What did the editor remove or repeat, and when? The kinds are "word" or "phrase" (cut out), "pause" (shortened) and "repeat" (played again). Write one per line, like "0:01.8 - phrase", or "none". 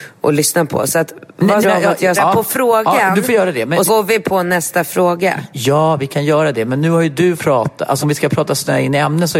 0:01.6 - word
0:02.1 - word
0:03.9 - word
0:07.4 - word
0:08.0 - word